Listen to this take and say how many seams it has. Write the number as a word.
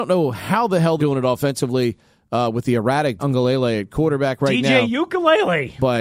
two